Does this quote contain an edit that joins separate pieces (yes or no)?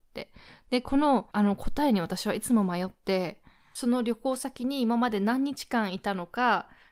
yes